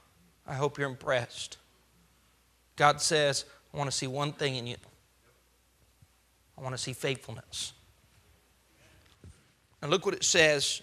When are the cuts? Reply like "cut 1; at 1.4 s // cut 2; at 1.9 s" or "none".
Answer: none